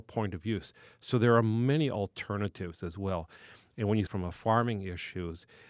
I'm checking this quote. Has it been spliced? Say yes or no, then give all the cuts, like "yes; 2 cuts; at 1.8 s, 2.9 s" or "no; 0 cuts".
yes; 1 cut; at 4.1 s